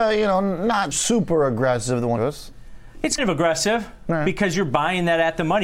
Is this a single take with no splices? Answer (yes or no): no